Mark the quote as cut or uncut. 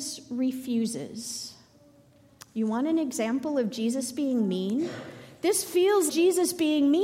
cut